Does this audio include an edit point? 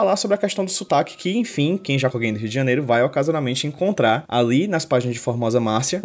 yes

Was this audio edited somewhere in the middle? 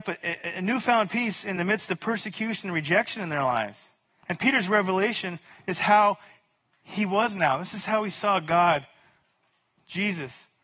no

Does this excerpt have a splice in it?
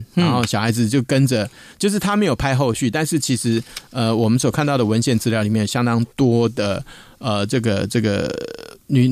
no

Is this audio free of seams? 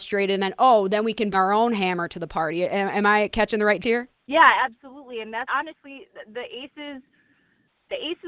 no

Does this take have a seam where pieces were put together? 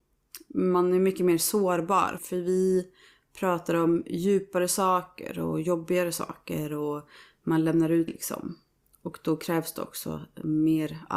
yes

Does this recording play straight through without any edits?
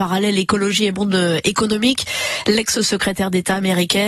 yes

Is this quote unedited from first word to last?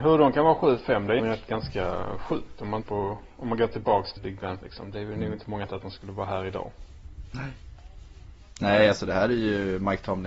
no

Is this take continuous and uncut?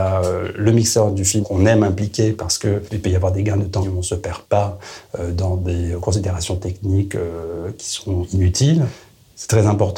no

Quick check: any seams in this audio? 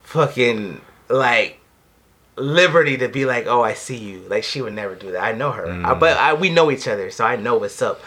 no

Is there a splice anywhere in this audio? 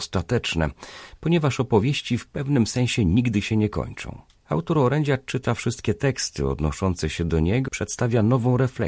yes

